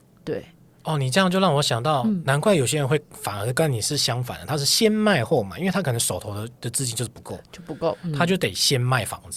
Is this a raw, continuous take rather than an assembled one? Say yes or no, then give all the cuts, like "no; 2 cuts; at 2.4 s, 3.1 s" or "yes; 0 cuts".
no; 1 cut; at 6.6 s